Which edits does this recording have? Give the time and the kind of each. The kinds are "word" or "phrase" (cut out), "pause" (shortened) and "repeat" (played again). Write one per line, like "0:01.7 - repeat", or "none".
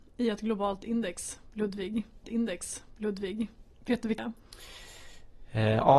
0:02.2 - repeat
0:04.2 - word